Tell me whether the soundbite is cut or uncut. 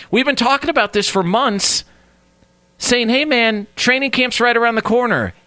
uncut